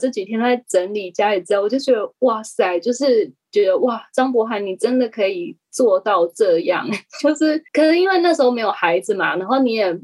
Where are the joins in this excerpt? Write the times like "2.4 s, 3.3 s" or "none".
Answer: 7.7 s